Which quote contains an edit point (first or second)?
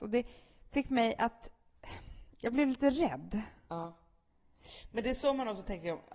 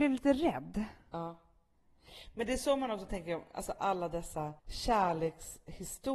second